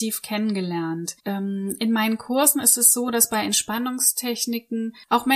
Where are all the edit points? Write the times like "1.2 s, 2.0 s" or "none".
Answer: 1.2 s